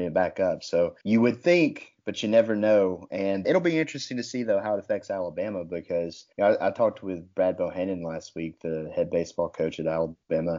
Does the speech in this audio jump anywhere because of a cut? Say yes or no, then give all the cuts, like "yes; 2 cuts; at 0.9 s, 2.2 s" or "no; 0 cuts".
yes; 3 cuts; at 1.0 s, 3.4 s, 6.3 s